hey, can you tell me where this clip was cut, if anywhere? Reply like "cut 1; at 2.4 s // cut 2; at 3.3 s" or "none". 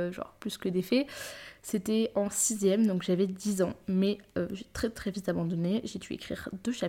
none